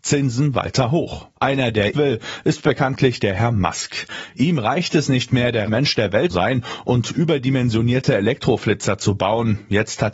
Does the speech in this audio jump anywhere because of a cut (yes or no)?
yes